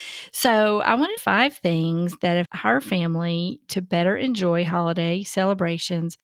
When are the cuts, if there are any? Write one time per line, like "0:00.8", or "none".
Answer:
0:01.2
0:02.4